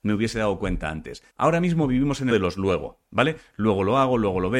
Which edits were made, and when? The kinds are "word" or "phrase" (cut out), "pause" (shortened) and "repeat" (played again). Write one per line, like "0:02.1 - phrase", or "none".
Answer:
0:01.3 - pause
0:02.3 - word